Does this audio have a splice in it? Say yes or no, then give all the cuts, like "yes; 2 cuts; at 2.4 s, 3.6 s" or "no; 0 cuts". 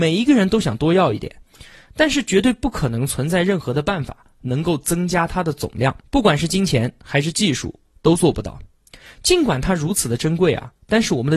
yes; 1 cut; at 6.0 s